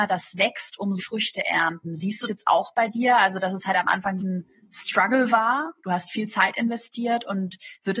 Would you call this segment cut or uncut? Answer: cut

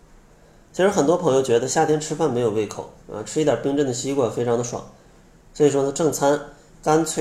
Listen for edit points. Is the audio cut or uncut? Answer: cut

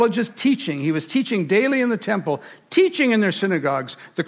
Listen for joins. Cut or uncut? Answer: uncut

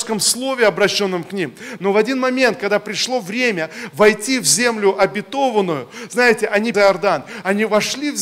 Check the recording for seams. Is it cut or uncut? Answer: cut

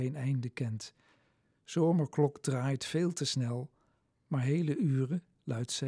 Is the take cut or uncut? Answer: uncut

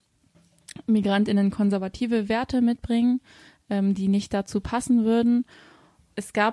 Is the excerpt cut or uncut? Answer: uncut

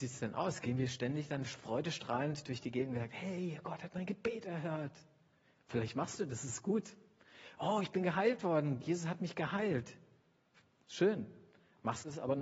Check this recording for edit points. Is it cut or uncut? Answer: uncut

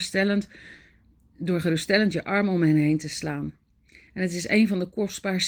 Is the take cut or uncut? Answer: uncut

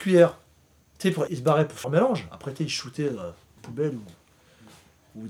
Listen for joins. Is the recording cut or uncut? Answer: cut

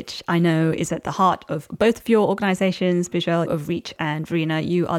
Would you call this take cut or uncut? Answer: cut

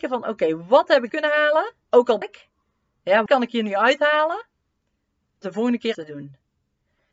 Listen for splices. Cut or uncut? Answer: cut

